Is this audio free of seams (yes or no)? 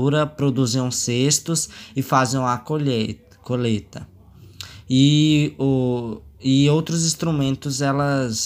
yes